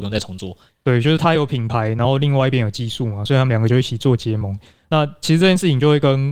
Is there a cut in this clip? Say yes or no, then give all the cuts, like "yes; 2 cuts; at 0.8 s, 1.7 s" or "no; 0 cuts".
no; 0 cuts